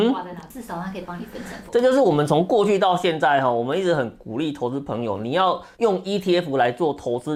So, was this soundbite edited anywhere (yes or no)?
yes